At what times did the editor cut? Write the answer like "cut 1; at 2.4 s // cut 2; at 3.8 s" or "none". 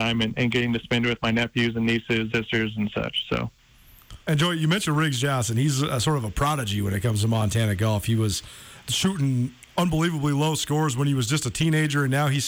cut 1; at 2.3 s // cut 2; at 4.2 s // cut 3; at 8.8 s